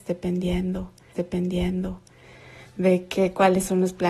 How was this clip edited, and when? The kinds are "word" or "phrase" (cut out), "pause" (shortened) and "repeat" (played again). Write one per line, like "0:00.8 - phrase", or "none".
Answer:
0:01.1 - repeat